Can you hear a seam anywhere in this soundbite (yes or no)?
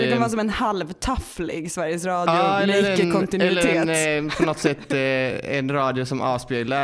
no